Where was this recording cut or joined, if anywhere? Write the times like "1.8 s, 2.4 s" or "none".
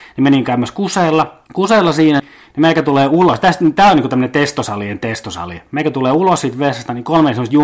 1.5 s, 2.2 s